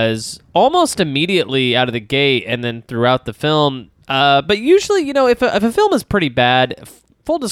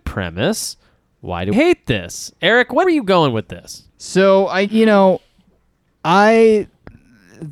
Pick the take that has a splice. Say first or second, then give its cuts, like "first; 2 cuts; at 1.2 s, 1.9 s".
second; 4 cuts; at 1.5 s, 2.8 s, 3.9 s, 4.7 s